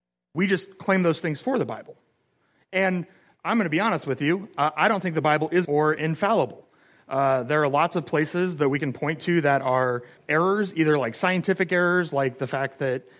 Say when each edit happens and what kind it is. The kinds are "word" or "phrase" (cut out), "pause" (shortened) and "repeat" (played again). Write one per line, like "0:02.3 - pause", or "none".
0:05.6 - word
0:10.2 - word